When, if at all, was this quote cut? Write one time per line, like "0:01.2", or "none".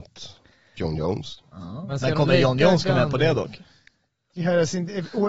none